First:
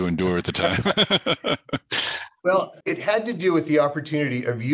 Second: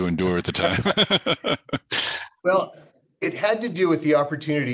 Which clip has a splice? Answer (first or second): first